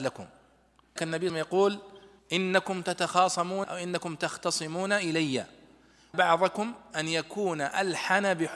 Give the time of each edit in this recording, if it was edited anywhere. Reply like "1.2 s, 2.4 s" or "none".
1.0 s, 1.3 s, 2.2 s, 3.6 s, 6.1 s